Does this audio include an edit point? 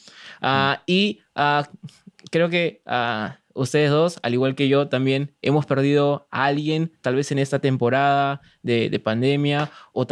no; 0 cuts

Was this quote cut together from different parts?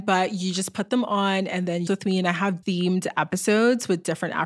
yes; 2 cuts; at 1.9 s, 2.6 s

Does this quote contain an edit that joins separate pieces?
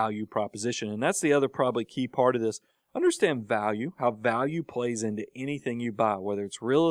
no; 0 cuts

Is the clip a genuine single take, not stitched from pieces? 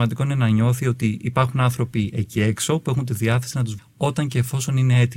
no; 1 cut; at 3.8 s

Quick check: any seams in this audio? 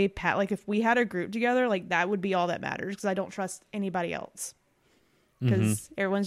no; 0 cuts

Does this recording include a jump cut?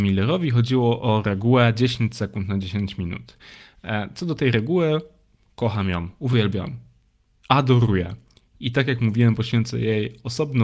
no; 0 cuts

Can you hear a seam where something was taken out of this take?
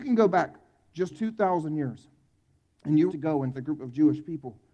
yes; 3 cuts; at 1.1 s, 3.1 s, 3.5 s

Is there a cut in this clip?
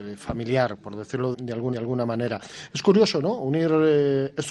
yes; 2 cuts; at 1.3 s, 1.7 s

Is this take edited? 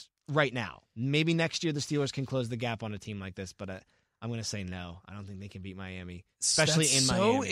no; 0 cuts

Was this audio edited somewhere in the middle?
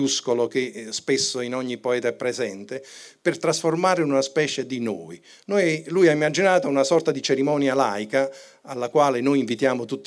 no; 0 cuts

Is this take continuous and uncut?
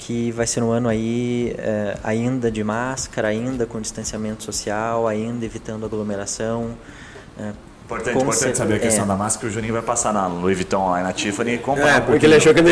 yes; 0 cuts

